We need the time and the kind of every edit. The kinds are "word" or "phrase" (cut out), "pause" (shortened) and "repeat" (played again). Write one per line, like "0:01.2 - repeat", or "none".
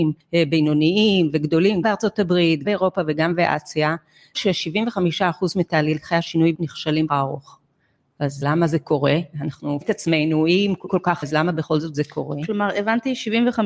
0:01.8 - word
0:02.6 - word
0:04.3 - word
0:06.5 - word
0:07.1 - word
0:08.4 - word
0:09.8 - word
0:10.9 - word
0:11.2 - word